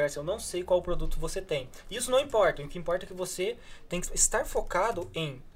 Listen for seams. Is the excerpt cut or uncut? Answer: cut